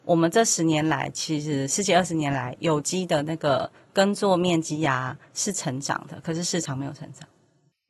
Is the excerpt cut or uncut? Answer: uncut